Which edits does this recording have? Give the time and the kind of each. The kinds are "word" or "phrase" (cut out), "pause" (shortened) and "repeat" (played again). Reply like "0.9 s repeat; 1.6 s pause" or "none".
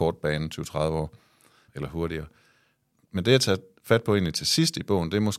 none